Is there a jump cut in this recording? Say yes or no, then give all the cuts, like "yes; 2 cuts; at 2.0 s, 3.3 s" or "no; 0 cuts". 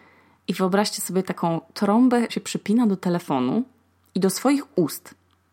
yes; 1 cut; at 2.3 s